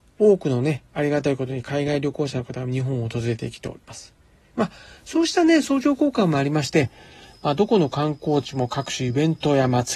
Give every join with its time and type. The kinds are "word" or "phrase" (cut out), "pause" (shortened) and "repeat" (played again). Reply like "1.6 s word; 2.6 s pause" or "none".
none

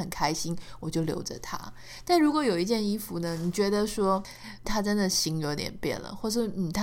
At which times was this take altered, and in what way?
4.6 s word

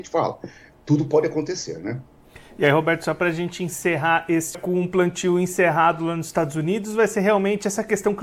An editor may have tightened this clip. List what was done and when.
4.5 s phrase

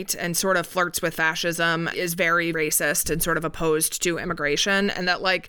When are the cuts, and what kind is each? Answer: 1.9 s word; 2.5 s word

